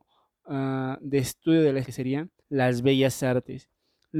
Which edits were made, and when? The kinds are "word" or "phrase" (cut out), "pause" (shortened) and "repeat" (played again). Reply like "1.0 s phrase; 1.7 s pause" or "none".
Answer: 1.8 s word; 2.4 s pause